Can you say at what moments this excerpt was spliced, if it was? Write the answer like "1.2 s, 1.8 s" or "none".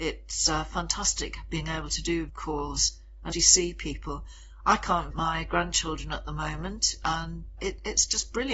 2.3 s, 3.3 s, 5.1 s, 7.6 s